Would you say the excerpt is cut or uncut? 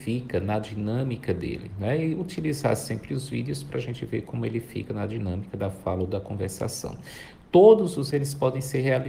cut